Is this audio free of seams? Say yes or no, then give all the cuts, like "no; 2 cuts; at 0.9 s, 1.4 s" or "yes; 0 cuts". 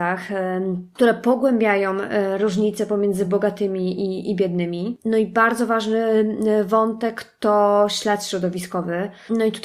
yes; 0 cuts